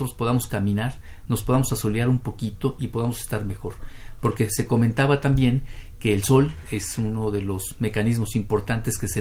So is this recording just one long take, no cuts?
yes; 0 cuts

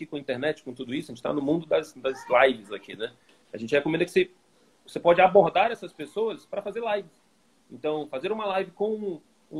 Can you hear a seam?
no; 0 cuts

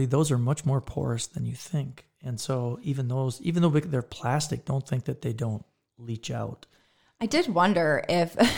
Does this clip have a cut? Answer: no; 0 cuts

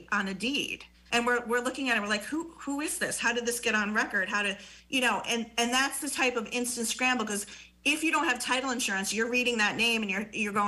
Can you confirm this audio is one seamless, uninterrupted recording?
no; 1 cut; at 0.9 s

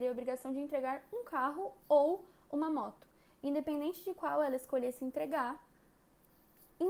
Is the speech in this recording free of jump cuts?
yes; 0 cuts

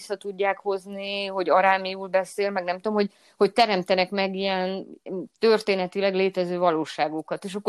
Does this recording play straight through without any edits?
yes; 0 cuts

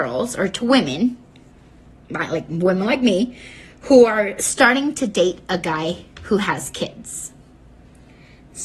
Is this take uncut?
yes; 0 cuts

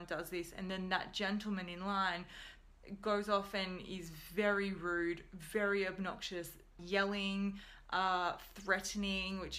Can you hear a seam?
yes; 1 cut; at 6.8 s

